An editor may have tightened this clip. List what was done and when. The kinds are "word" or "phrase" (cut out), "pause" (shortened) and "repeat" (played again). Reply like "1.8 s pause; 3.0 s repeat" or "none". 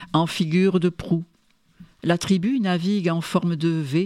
1.9 s pause